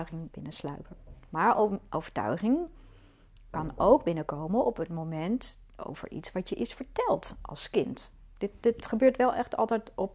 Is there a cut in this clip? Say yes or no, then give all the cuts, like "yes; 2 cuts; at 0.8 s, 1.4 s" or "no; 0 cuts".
no; 0 cuts